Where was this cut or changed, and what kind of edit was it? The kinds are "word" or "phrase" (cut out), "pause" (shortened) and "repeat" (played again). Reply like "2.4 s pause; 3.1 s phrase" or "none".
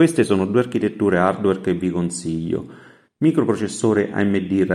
none